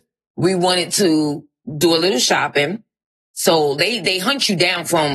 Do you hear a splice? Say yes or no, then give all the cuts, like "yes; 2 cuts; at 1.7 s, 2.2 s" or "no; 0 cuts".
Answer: no; 0 cuts